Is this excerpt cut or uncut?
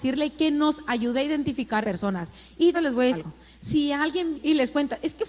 cut